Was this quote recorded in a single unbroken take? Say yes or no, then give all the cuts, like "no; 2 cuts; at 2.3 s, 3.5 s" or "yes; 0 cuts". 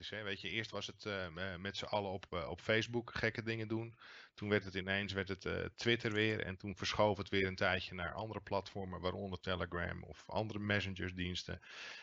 yes; 0 cuts